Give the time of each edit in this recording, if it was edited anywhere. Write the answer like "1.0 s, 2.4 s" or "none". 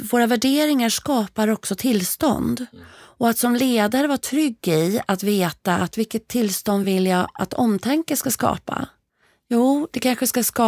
none